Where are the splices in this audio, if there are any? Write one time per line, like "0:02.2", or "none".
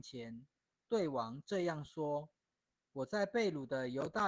0:02.4